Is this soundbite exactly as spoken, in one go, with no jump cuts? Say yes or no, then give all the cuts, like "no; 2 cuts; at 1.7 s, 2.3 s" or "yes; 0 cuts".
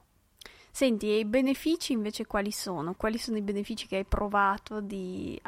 no; 1 cut; at 2.9 s